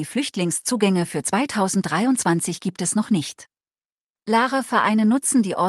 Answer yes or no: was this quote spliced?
no